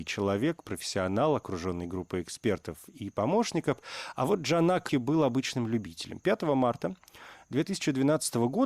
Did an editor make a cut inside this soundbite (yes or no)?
yes